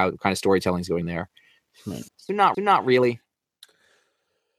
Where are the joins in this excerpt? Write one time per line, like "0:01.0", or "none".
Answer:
0:01.0
0:02.1
0:02.5